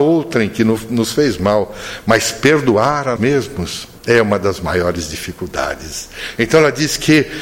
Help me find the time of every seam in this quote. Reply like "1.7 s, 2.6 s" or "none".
3.2 s, 4.0 s